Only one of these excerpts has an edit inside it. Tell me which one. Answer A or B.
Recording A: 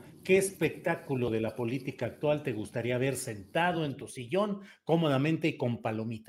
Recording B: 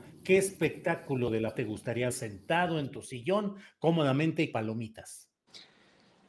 B